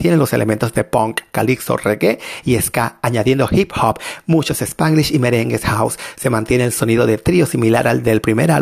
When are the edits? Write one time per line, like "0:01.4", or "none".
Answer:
none